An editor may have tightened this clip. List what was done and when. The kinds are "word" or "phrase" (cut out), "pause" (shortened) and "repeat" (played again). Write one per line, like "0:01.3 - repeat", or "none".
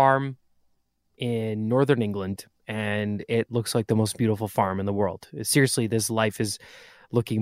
none